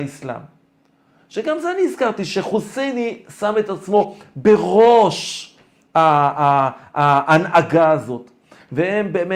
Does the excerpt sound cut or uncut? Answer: uncut